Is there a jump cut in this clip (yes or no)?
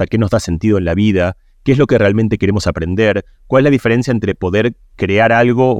no